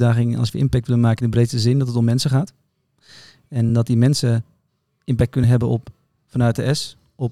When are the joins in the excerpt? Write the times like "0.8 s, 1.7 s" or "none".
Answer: none